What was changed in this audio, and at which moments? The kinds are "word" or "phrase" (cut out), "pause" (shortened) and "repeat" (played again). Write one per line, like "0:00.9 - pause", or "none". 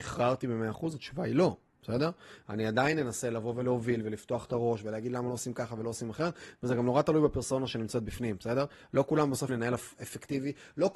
0:09.5 - word